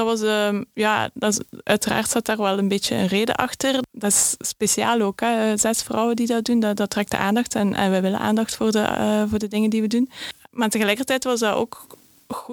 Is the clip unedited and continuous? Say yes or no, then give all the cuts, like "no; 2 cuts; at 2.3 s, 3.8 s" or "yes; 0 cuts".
yes; 0 cuts